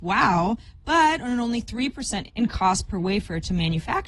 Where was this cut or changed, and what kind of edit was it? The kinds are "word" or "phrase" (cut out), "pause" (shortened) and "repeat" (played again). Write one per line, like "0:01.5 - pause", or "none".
0:02.3 - word